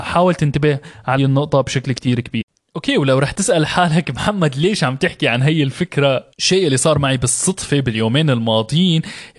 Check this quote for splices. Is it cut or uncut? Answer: cut